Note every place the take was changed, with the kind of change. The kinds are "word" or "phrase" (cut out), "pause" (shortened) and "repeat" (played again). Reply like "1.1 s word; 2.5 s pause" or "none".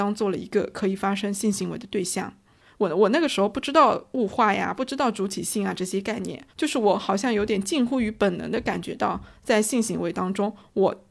6.5 s pause